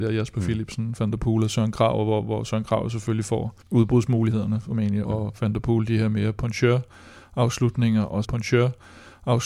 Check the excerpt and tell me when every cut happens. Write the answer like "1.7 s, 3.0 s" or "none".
3.6 s, 5.0 s, 8.2 s